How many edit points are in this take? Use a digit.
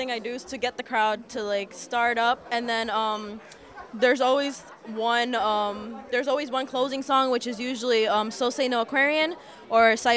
0